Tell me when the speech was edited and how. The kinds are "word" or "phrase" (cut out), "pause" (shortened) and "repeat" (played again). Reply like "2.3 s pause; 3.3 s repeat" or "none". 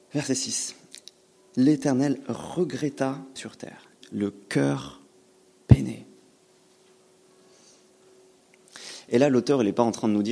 3.4 s phrase; 4.0 s phrase